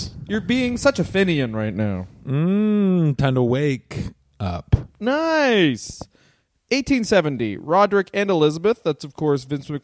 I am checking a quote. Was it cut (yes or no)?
no